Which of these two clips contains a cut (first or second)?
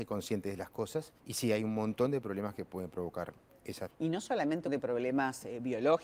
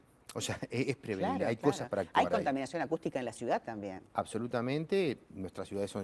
first